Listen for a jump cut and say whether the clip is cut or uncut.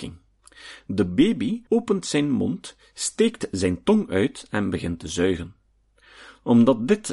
cut